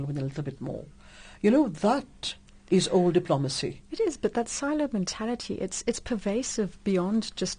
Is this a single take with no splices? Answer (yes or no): yes